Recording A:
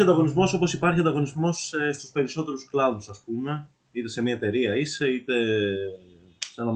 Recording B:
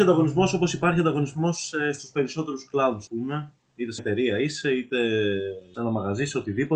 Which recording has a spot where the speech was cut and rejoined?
B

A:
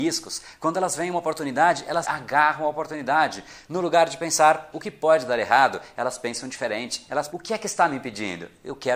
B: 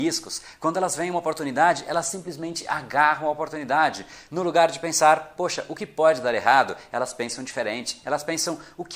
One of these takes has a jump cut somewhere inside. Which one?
A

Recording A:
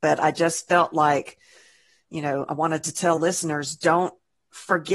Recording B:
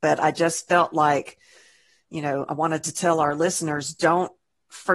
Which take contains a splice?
A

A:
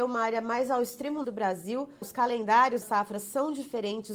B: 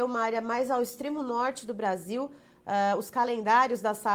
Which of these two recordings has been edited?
A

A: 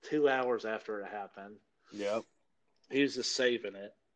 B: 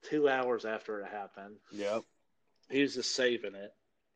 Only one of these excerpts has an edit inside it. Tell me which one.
B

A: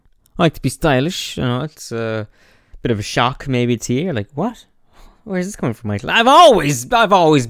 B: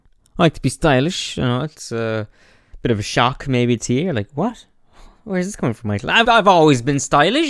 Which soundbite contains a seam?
B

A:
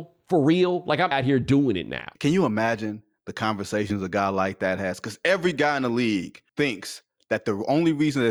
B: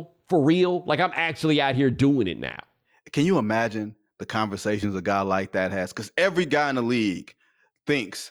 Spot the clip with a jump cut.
A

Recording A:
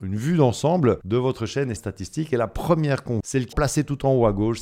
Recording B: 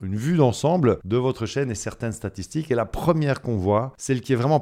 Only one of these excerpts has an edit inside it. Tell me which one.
A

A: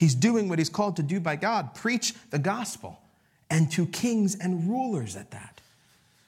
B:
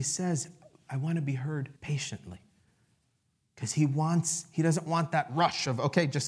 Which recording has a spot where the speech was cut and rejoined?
B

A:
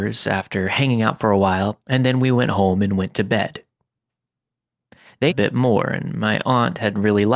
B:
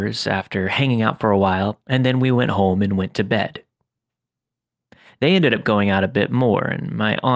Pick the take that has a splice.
A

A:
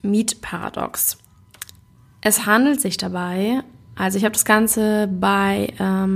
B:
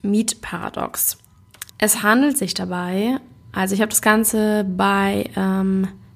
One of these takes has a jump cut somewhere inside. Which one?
B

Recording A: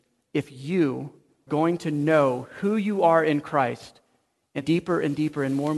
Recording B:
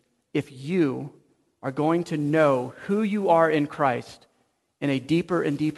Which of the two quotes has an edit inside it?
A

